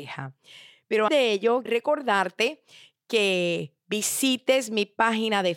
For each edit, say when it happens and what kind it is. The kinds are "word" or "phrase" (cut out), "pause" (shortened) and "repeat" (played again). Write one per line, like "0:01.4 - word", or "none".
0:01.1 - word
0:01.7 - word